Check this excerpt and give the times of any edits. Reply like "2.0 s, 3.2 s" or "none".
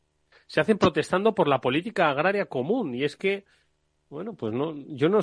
none

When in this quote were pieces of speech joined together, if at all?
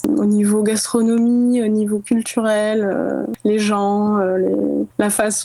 none

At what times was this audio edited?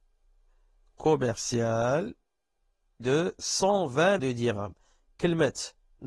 3.0 s, 4.2 s

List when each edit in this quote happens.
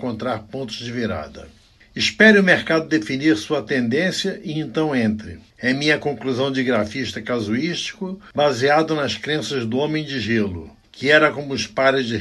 none

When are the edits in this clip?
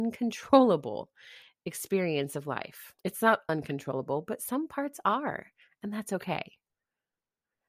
3.0 s, 3.5 s

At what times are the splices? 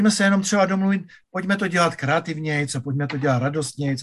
none

